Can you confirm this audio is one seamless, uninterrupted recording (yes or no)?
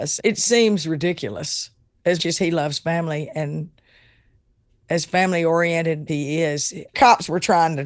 no